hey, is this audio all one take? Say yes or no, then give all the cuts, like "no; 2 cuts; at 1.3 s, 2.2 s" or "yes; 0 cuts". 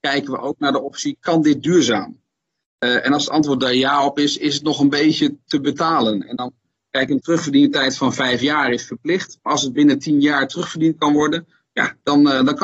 yes; 0 cuts